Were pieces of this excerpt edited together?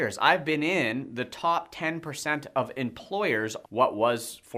yes; 1 cut; at 3.6 s

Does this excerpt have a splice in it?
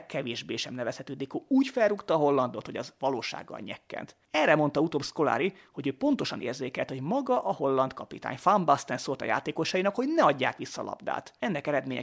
no; 0 cuts

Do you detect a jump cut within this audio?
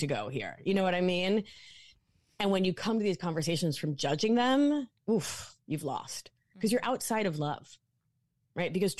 yes; 1 cut; at 5.6 s

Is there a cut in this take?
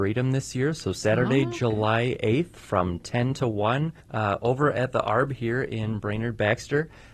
yes; 1 cut; at 4.0 s

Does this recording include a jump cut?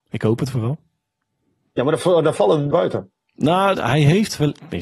yes; 2 cuts; at 2.7 s, 3.7 s

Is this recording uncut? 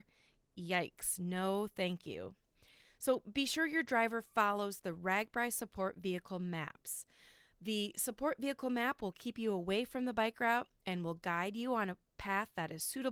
yes; 0 cuts

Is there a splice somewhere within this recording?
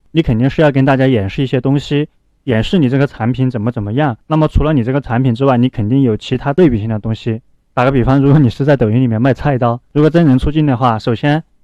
yes; 1 cut; at 4.2 s

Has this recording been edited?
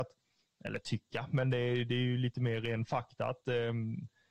no; 0 cuts

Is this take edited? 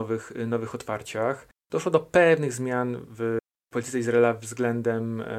no; 0 cuts

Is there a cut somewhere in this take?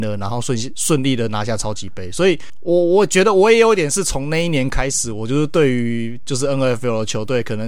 no; 0 cuts

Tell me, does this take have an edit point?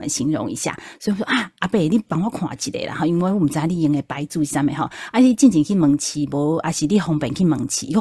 no; 0 cuts

